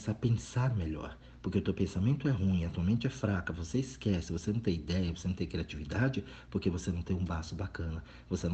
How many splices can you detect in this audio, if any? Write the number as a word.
zero